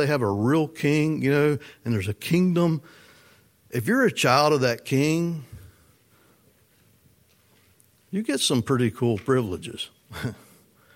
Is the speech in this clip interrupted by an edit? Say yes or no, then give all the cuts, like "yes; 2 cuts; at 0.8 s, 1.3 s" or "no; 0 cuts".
no; 0 cuts